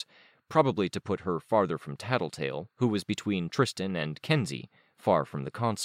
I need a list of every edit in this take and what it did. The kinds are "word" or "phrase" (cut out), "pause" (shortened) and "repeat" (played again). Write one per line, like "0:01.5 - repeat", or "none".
none